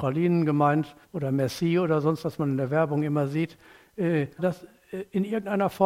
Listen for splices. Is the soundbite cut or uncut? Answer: cut